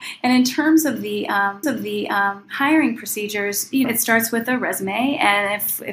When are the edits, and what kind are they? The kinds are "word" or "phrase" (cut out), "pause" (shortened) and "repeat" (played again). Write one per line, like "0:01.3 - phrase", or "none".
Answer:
0:01.6 - repeat
0:03.8 - word